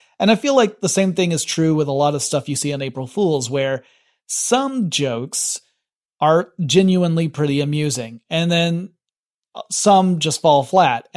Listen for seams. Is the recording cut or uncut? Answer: uncut